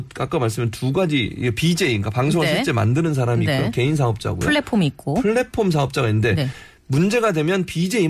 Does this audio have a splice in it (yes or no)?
no